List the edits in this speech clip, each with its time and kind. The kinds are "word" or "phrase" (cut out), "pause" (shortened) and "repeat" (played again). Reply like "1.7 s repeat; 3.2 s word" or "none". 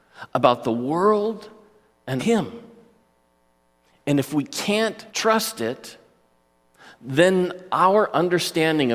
2.2 s phrase; 5.1 s pause